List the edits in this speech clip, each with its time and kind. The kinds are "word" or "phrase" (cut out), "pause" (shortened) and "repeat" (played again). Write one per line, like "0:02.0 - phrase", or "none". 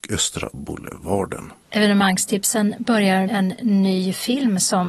0:01.6 - pause
0:03.3 - word